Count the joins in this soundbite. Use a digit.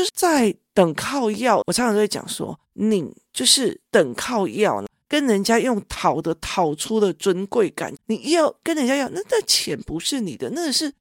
1